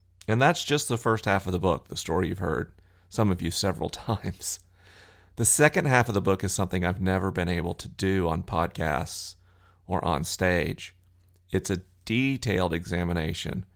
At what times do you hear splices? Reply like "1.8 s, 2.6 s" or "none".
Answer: none